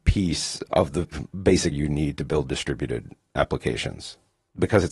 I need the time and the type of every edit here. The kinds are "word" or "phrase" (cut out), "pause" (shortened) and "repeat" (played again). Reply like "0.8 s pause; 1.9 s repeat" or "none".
1.7 s word